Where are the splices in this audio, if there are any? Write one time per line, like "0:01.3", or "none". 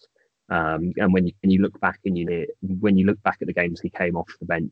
0:01.4
0:02.3